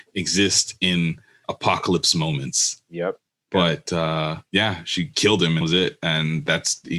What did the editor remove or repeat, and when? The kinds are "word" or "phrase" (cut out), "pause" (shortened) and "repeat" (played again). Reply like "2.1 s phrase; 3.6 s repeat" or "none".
1.4 s word; 4.5 s pause; 5.1 s word; 5.6 s word